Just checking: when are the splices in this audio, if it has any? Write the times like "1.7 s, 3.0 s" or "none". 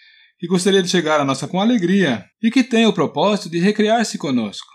1.5 s, 2.3 s